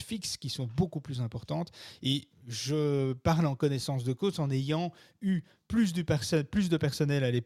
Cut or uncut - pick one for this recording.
uncut